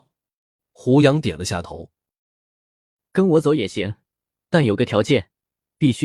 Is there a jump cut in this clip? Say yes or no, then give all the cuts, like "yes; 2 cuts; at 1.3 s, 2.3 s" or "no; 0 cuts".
no; 0 cuts